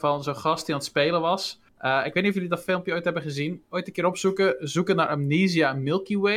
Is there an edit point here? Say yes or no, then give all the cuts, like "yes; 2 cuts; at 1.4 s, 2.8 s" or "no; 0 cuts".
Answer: yes; 1 cut; at 1.7 s